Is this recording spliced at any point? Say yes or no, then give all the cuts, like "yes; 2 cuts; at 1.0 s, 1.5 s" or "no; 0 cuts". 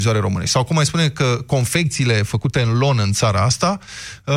no; 0 cuts